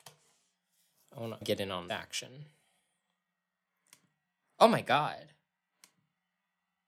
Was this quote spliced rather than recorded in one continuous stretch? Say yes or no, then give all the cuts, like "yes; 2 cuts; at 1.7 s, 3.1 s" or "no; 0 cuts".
yes; 2 cuts; at 1.4 s, 1.9 s